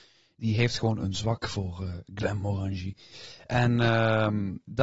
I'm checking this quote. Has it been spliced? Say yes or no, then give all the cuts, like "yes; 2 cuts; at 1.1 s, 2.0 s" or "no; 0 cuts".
no; 0 cuts